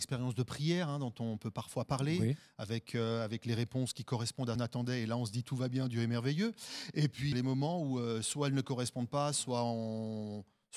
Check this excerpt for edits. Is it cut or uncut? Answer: cut